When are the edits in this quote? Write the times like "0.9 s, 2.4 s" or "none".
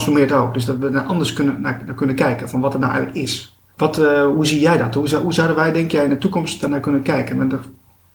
3.7 s